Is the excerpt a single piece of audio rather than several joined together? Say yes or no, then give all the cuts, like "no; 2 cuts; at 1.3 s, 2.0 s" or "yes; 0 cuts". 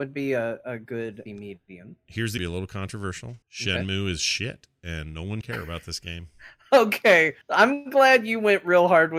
no; 5 cuts; at 1.3 s, 2.4 s, 3.4 s, 5.4 s, 7.4 s